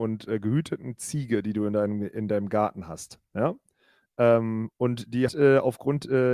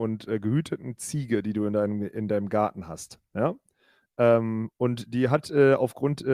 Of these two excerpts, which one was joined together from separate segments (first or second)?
first